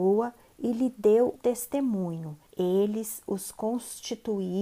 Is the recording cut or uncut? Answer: cut